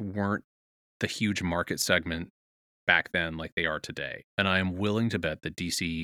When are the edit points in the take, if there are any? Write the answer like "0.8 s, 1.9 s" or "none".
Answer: 4.3 s